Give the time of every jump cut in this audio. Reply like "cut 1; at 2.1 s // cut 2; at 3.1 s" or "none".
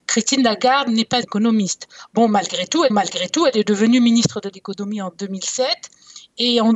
cut 1; at 1.2 s // cut 2; at 2.9 s